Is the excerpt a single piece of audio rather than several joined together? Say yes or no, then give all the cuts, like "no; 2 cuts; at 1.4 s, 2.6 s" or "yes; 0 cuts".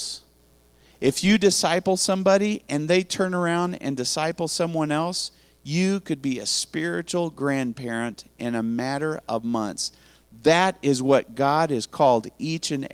yes; 0 cuts